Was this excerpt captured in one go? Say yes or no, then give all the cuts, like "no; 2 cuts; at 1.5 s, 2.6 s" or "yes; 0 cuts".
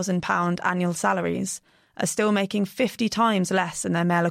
yes; 0 cuts